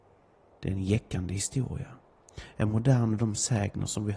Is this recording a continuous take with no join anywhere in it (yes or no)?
no